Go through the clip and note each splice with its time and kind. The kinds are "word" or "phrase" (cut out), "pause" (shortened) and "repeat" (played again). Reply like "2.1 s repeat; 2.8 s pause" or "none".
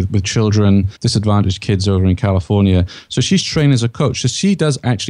1.0 s pause